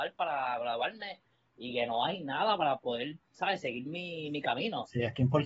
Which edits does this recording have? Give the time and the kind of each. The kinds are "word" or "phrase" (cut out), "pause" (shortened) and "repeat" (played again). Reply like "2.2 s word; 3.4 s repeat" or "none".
none